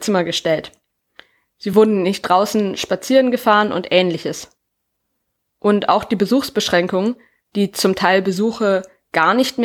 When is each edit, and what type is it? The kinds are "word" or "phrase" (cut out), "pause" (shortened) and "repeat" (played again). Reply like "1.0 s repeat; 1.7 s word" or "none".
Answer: none